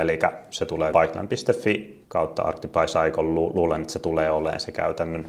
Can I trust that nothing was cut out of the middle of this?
no; 2 cuts; at 0.9 s, 2.0 s

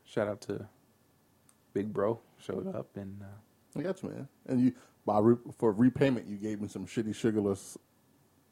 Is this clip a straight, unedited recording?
yes; 0 cuts

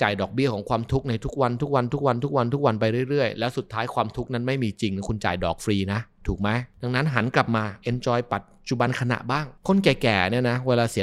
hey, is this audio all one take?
yes; 0 cuts

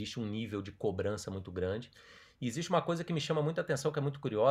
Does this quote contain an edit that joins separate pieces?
no; 0 cuts

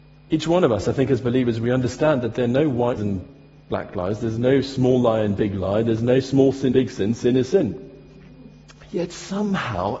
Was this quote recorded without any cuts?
no; 2 cuts; at 3.0 s, 6.7 s

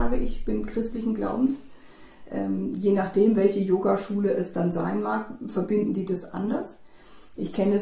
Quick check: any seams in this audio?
no; 0 cuts

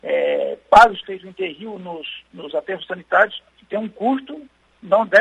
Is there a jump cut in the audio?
yes; 2 cuts; at 1.0 s, 3.5 s

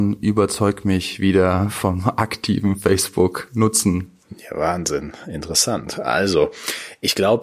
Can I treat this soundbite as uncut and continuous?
yes; 0 cuts

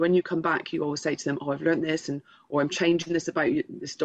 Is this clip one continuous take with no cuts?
yes; 0 cuts

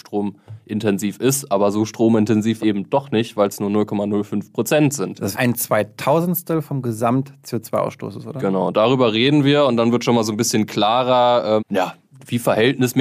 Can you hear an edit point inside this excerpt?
yes; 3 cuts; at 2.6 s, 5.3 s, 11.6 s

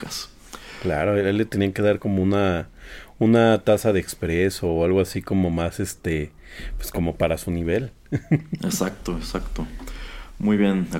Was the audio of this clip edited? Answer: no; 0 cuts

